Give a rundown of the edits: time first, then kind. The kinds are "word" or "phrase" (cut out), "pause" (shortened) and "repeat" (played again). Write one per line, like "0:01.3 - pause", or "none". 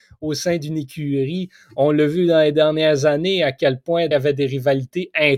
0:04.1 - phrase